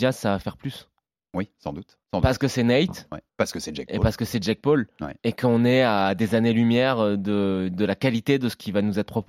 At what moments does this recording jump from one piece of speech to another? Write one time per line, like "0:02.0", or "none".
0:01.1
0:02.0
0:03.3
0:05.2